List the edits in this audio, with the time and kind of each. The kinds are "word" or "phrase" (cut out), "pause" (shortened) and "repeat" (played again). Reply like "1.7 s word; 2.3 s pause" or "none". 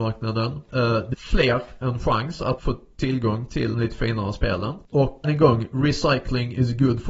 1.1 s word; 1.8 s word; 2.6 s word; 3.7 s word; 5.2 s word